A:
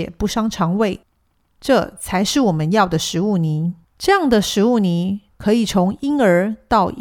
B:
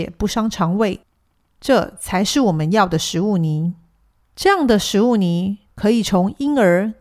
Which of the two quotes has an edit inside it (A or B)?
A